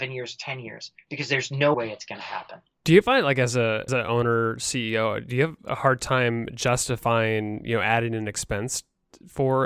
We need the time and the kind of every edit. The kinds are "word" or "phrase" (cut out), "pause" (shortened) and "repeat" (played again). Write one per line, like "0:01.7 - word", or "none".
0:01.7 - word
0:03.9 - word